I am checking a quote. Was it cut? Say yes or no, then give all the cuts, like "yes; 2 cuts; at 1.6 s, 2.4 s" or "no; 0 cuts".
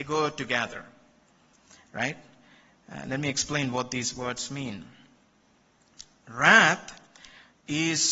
no; 0 cuts